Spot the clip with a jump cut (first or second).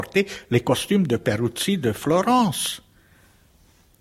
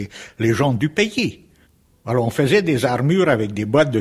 second